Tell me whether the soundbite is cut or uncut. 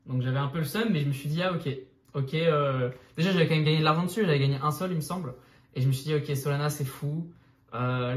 uncut